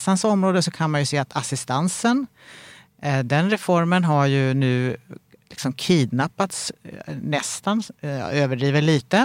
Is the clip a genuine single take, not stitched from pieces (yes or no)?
yes